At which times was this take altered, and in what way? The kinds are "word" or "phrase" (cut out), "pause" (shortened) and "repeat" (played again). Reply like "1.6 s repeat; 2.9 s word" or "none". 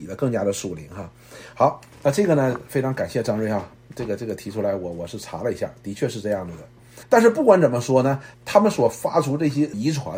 7.0 s pause; 8.3 s pause

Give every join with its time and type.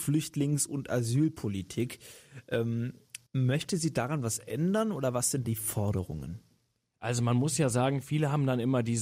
3.3 s pause; 5.4 s word

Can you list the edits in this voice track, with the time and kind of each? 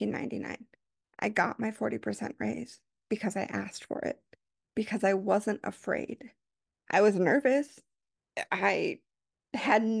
none

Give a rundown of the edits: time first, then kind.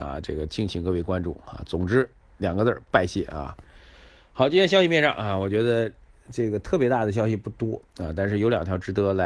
none

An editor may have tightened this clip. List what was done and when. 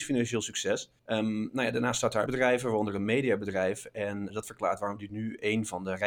1.0 s pause; 2.3 s word; 4.3 s word

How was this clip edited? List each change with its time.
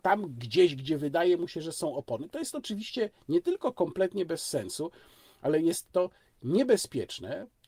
none

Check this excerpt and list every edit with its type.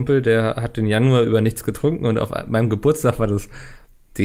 none

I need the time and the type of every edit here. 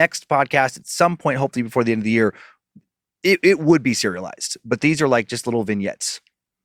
none

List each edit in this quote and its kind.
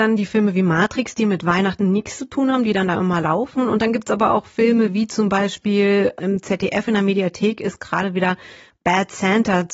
none

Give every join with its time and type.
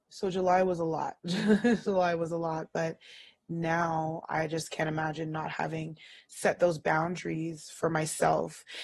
none

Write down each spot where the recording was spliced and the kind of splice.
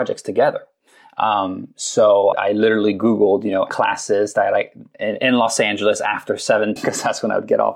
2.3 s word; 3.7 s word; 6.8 s word

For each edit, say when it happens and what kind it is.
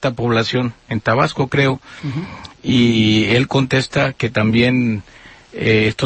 none

